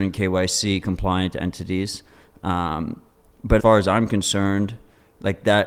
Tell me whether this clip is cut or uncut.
cut